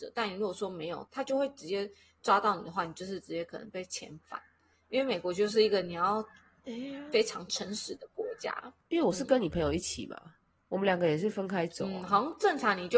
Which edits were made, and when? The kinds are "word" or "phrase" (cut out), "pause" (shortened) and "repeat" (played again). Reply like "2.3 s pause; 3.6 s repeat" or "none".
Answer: 8.8 s pause; 10.4 s pause

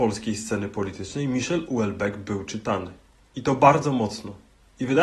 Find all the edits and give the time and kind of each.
none

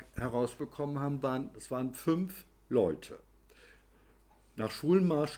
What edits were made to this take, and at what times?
none

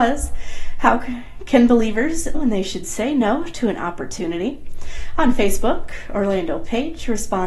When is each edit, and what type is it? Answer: 2.3 s word

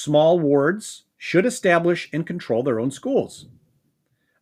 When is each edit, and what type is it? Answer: 1.1 s pause

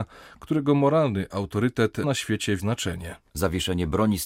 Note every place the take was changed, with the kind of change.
2.0 s word; 2.6 s word

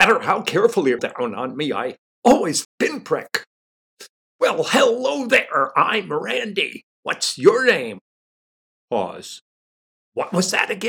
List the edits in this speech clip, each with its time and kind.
1.0 s phrase; 2.6 s phrase; 6.9 s pause

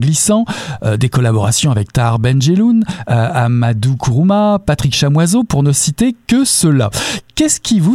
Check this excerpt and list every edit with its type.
none

